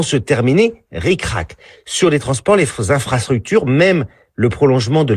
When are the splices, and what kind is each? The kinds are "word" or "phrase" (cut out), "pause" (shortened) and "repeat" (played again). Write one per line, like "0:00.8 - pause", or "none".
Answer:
none